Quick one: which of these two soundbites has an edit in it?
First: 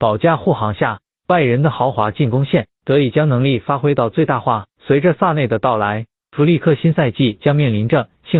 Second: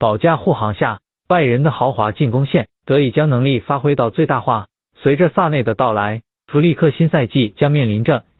first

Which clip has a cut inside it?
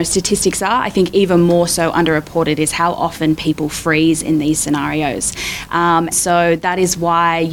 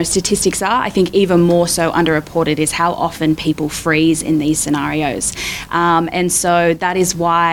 first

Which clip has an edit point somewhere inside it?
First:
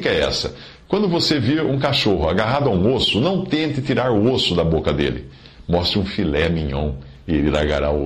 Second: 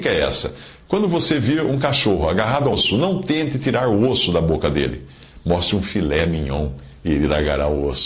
second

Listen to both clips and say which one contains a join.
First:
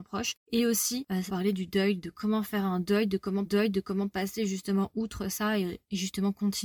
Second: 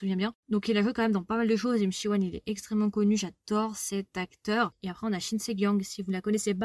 first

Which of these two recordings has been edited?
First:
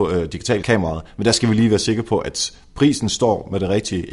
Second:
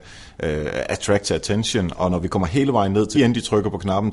second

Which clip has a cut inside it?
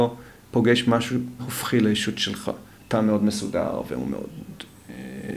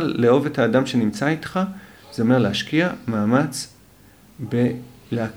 first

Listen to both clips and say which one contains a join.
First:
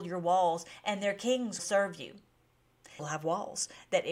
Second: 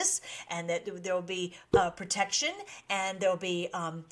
first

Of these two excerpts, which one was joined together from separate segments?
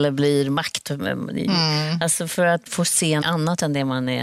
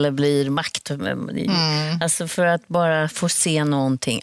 first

